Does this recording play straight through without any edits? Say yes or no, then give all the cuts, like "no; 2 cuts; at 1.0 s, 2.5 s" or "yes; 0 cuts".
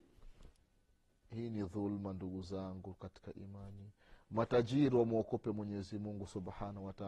yes; 0 cuts